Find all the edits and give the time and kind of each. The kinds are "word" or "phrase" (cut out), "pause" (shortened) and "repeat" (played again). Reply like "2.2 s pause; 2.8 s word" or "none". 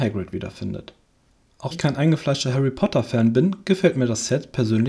1.7 s word